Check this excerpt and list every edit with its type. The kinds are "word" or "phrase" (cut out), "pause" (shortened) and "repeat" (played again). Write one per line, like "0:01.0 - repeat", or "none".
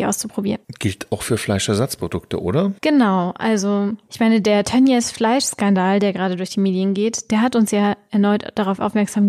0:02.8 - pause